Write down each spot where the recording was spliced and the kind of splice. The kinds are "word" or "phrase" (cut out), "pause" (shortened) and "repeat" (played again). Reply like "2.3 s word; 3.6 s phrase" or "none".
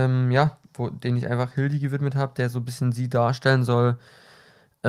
none

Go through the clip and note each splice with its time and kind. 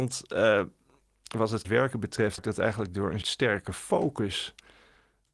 1.6 s word; 2.4 s word; 3.2 s word

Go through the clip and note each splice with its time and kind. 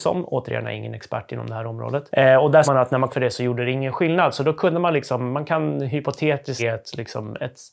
2.6 s word; 3.1 s word; 6.6 s word

